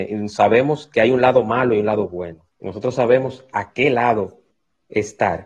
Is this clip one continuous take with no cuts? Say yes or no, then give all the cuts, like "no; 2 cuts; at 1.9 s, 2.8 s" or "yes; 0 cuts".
no; 1 cut; at 2.5 s